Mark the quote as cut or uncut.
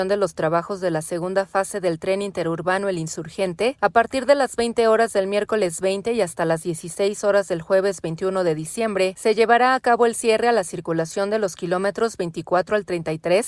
uncut